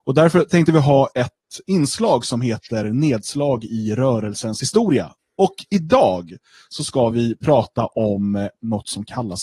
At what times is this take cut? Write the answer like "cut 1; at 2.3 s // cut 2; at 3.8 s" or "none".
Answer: none